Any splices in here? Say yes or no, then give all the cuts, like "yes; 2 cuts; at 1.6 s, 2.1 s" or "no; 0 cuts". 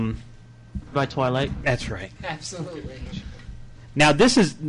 yes; 1 cut; at 0.9 s